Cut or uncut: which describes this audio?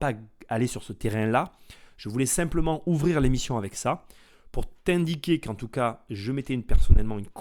uncut